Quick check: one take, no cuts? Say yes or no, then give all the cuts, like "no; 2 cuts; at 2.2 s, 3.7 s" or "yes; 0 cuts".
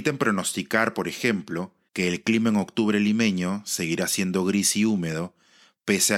no; 1 cut; at 1.9 s